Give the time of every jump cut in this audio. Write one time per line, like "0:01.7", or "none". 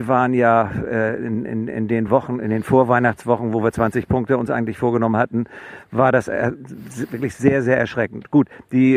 none